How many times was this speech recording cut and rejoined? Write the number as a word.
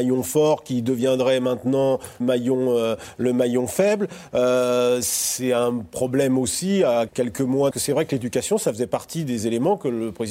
three